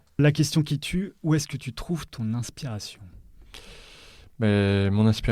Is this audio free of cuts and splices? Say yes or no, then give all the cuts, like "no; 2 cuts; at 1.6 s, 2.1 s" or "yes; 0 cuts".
yes; 0 cuts